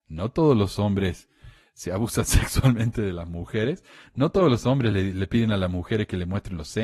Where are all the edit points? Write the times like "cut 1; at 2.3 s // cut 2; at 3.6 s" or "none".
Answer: none